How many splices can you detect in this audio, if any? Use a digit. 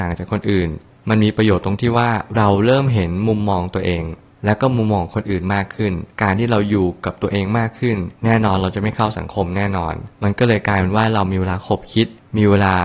3